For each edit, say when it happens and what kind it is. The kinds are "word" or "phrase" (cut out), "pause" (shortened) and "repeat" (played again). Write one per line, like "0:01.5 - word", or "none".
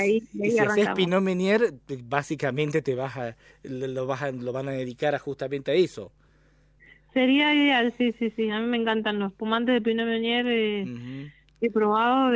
none